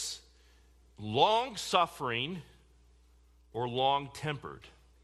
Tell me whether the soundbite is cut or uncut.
uncut